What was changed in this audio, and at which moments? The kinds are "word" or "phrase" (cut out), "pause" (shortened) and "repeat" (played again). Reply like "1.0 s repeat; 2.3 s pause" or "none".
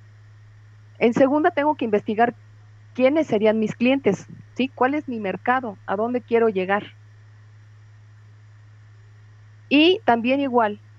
none